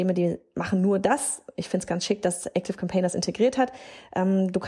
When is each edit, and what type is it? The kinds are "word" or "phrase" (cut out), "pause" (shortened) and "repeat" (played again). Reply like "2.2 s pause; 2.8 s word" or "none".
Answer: none